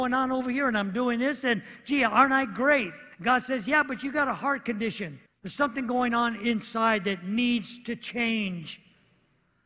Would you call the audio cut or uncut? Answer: cut